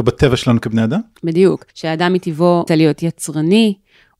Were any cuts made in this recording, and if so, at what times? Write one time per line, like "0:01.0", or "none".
0:01.7
0:02.7